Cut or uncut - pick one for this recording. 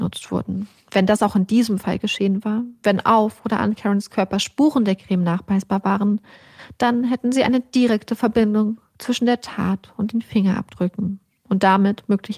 uncut